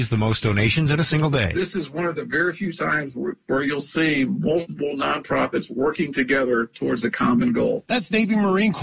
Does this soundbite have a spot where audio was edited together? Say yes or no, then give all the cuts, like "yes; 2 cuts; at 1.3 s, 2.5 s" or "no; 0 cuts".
no; 0 cuts